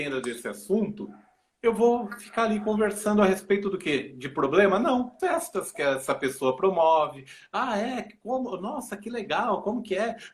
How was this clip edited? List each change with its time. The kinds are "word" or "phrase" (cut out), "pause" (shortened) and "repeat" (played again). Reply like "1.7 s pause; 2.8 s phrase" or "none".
5.2 s word